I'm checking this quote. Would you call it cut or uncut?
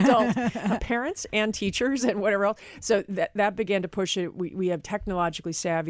uncut